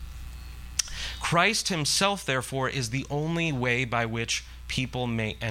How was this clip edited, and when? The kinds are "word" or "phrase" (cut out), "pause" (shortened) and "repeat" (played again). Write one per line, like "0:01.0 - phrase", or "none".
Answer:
none

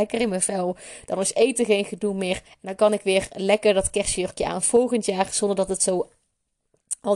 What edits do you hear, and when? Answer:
0:02.5 - pause

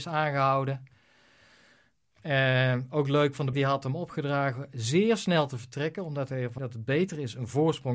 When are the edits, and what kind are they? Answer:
0:03.5 - word
0:06.6 - word

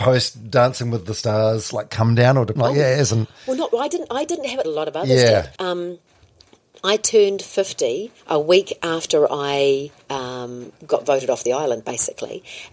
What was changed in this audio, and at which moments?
0:02.6 - word
0:04.6 - phrase
0:05.6 - word
0:08.2 - pause
0:10.0 - pause

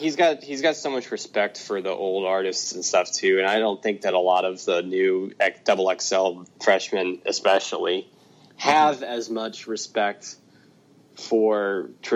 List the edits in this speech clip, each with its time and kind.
none

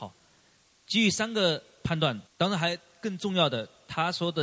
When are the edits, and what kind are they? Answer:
0:02.3 - pause

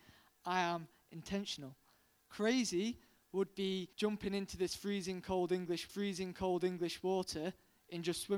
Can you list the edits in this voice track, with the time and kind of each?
0:03.9 - pause
0:05.9 - repeat

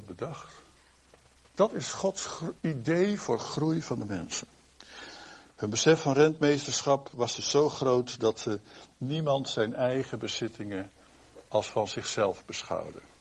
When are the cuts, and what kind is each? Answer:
0:01.1 - pause
0:02.6 - pause

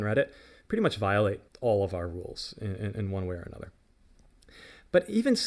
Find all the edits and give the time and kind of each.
0:01.5 - pause

